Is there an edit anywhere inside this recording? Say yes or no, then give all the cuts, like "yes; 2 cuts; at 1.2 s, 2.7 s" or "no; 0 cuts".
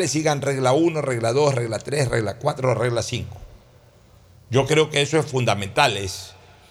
no; 0 cuts